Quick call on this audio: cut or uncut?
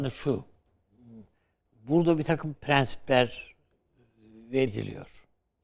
cut